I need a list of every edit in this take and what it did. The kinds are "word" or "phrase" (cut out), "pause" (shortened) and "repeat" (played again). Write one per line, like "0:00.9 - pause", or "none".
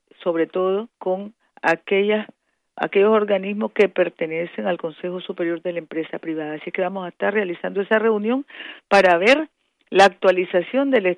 0:00.9 - pause